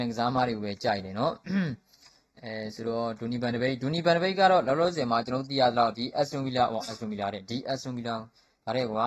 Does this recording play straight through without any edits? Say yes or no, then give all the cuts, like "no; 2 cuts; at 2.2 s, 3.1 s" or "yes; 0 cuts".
yes; 0 cuts